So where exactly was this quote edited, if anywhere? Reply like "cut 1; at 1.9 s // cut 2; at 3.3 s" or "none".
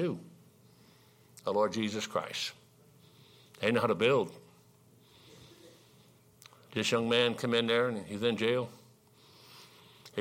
none